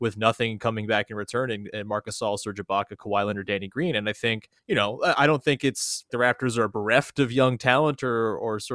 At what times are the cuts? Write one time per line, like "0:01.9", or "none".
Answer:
0:04.6
0:06.1